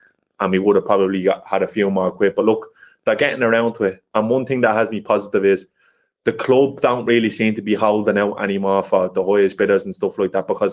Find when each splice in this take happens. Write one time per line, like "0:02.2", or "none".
none